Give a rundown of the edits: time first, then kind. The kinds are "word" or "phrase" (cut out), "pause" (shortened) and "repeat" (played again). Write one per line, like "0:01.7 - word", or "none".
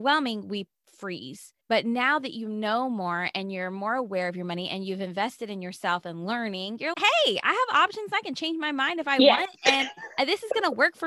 0:01.6 - pause
0:06.9 - word